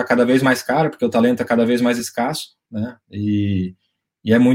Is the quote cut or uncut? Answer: uncut